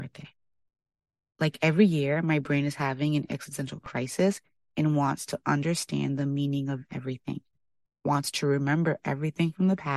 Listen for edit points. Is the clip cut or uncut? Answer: uncut